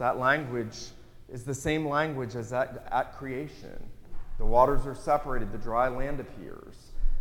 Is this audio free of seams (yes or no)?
yes